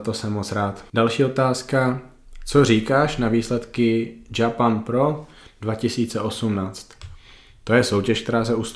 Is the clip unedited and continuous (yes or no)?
yes